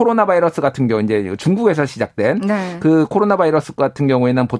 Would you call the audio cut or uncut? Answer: uncut